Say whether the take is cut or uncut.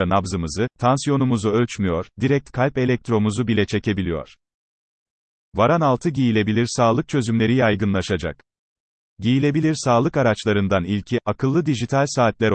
uncut